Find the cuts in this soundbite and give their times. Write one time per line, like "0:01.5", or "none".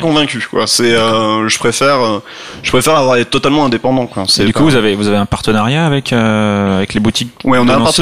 none